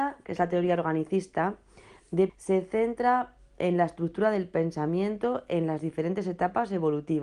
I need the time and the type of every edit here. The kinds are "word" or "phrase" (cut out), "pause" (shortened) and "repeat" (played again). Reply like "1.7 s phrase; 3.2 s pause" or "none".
2.3 s word